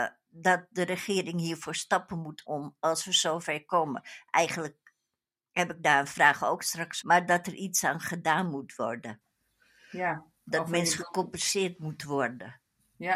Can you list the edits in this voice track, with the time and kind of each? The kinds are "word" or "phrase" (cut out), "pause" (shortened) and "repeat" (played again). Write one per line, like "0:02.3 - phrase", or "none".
0:02.4 - word
0:07.0 - word